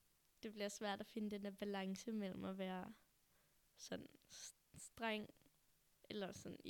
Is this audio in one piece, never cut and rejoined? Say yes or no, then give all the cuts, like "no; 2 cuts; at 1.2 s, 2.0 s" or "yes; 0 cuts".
yes; 0 cuts